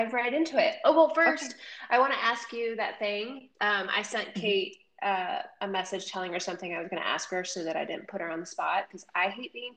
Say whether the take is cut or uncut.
cut